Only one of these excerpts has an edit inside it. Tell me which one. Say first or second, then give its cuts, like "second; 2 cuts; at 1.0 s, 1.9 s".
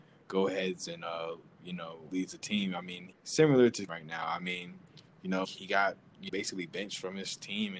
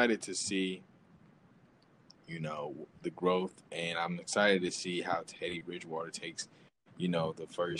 first; 5 cuts; at 2.1 s, 3.1 s, 3.9 s, 5.4 s, 6.3 s